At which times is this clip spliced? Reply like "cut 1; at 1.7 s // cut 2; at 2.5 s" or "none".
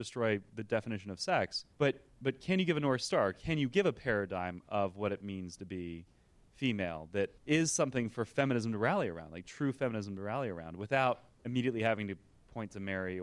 cut 1; at 1.7 s // cut 2; at 7.4 s // cut 3; at 11.3 s